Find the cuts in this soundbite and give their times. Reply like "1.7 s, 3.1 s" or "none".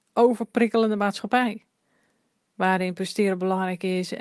none